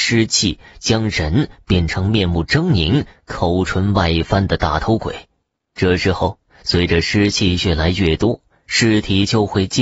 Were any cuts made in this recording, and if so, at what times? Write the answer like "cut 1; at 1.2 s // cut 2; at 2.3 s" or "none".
none